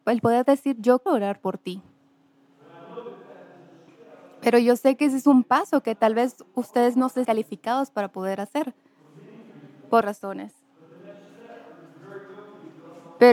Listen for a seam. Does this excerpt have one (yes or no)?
yes